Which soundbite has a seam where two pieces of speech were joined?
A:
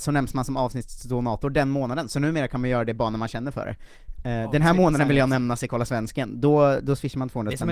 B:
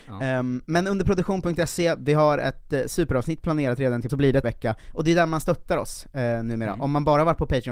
B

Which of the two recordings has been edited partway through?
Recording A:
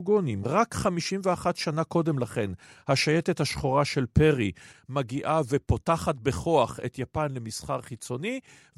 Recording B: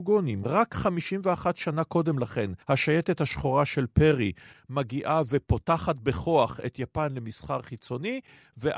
B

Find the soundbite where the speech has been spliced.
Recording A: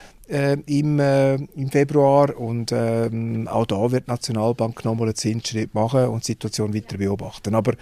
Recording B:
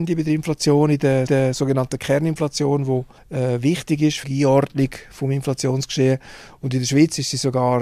B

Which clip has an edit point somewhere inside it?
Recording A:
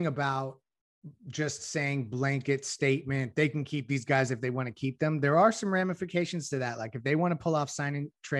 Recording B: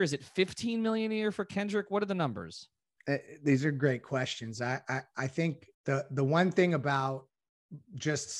B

